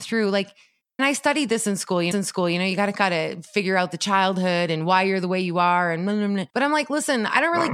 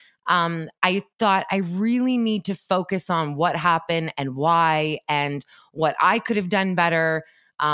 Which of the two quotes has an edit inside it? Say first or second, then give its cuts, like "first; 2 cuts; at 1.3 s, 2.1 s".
first; 3 cuts; at 1.0 s, 2.1 s, 6.5 s